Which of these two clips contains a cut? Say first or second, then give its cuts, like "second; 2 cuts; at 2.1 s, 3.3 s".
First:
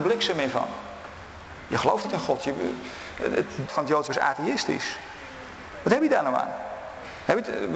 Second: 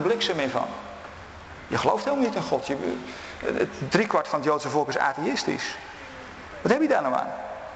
first; 3 cuts; at 2.0 s, 3.7 s, 4.1 s